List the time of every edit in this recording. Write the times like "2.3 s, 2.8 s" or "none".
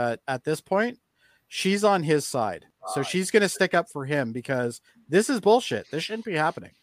none